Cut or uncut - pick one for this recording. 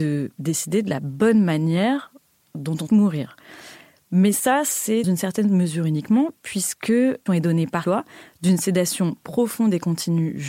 cut